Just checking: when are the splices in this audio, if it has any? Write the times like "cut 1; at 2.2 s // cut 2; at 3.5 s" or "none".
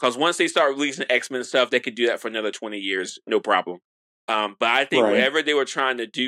none